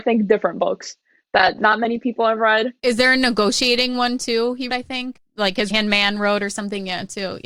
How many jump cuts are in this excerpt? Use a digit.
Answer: 2